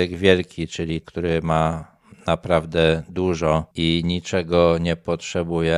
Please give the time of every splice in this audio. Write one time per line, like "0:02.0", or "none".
0:01.0